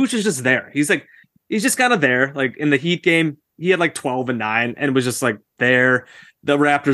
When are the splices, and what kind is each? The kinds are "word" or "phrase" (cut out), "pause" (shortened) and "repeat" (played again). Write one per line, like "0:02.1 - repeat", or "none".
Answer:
none

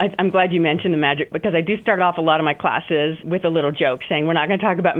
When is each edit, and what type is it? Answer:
0:01.3 - word

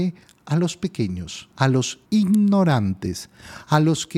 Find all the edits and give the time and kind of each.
0:01.5 - pause
0:02.1 - pause

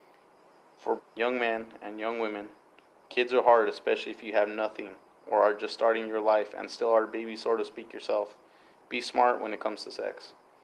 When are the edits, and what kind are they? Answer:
0:01.0 - word

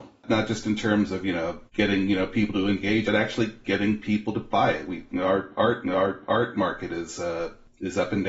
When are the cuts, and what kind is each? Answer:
0:01.7 - pause
0:03.0 - phrase
0:05.8 - repeat

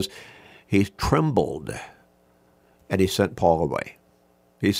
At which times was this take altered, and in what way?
none

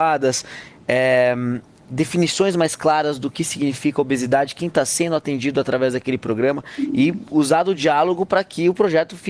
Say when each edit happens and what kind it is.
none

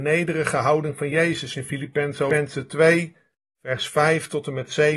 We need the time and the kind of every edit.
none

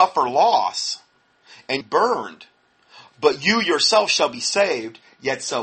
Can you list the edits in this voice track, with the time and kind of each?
0:01.8 - phrase

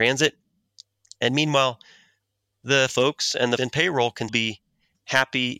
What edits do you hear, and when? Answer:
0:02.9 - word
0:03.6 - word
0:04.3 - word

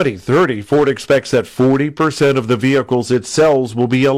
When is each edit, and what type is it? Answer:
none

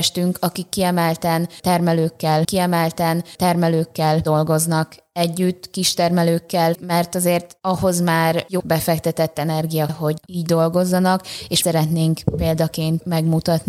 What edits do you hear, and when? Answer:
0:02.4 - repeat
0:06.7 - word
0:08.6 - word
0:09.9 - word
0:11.6 - phrase

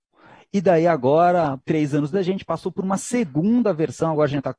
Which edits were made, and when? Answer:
0:01.6 - pause
0:02.1 - word

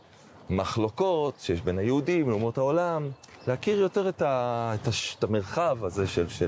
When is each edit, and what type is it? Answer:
none

